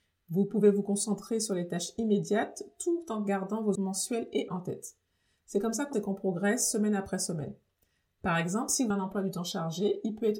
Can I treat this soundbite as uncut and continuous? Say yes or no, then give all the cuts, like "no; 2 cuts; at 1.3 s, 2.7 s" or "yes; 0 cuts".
no; 4 cuts; at 3.8 s, 4.5 s, 5.9 s, 8.9 s